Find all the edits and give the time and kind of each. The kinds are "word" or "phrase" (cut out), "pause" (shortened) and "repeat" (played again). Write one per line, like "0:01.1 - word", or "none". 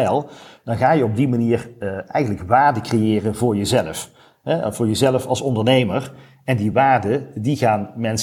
none

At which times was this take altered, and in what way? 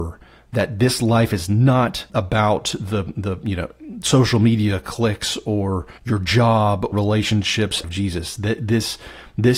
0:02.1 - word
0:06.0 - pause
0:06.9 - phrase
0:07.8 - word

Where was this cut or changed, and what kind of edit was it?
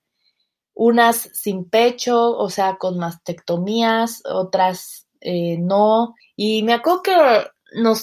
0:06.2 - pause

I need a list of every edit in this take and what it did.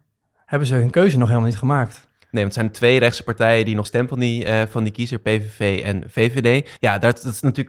0:03.8 - phrase
0:06.8 - pause

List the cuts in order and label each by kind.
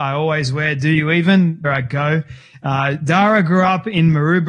0:01.6 - phrase

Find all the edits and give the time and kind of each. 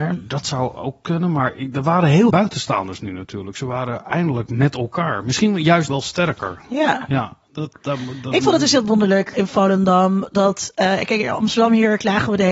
0:02.3 - word
0:05.9 - word
0:07.7 - word
0:09.3 - word

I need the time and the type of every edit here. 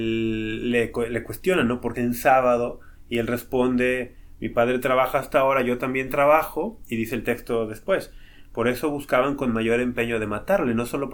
0:01.9 - phrase

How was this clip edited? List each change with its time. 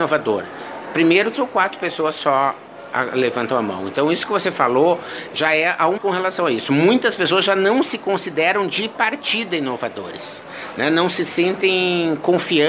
0:01.3 - word
0:06.0 - word

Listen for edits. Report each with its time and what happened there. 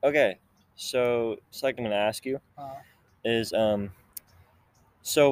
0:01.8 - word
0:02.5 - pause

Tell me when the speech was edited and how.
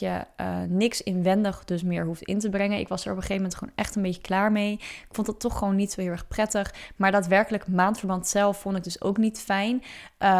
none

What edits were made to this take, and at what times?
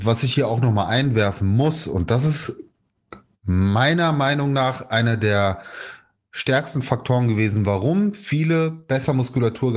none

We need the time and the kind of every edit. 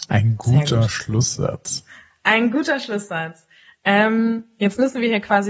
none

